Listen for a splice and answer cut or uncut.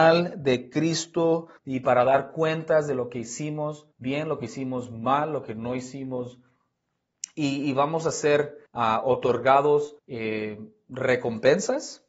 cut